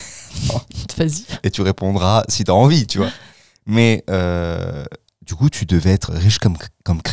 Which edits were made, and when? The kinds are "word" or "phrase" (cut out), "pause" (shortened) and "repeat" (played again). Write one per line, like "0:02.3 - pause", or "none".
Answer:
0:06.1 - word